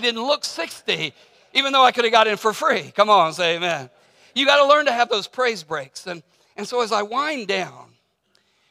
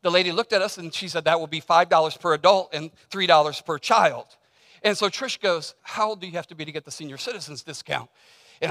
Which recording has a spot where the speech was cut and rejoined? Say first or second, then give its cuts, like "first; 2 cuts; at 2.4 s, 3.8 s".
second; 1 cut; at 5.8 s